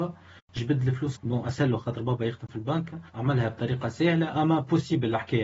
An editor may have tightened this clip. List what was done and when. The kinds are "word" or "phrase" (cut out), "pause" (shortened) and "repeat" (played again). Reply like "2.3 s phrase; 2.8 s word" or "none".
1.1 s word; 3.1 s pause; 4.4 s word